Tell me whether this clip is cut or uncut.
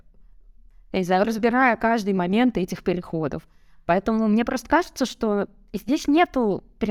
uncut